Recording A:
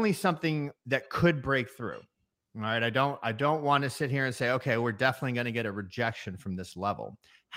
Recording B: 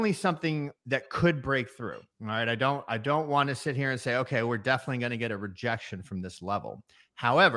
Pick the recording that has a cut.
B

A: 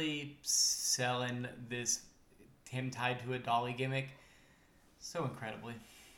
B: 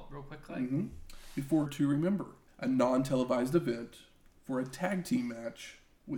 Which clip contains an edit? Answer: B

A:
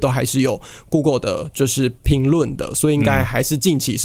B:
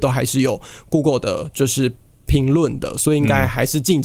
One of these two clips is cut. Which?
A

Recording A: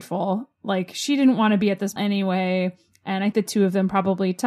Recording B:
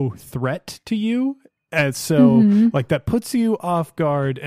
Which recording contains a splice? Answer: A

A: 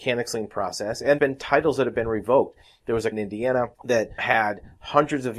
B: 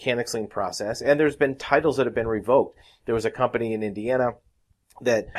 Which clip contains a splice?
A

